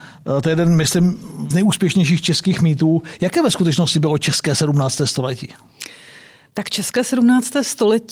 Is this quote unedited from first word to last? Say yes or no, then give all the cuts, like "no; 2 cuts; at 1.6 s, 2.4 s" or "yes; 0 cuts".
no; 1 cut; at 1.5 s